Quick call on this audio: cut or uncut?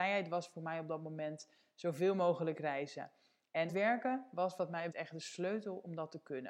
cut